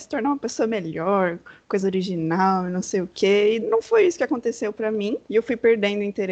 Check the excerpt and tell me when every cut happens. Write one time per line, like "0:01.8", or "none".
0:01.8
0:03.6
0:05.2